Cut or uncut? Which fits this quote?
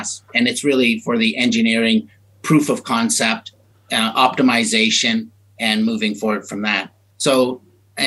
uncut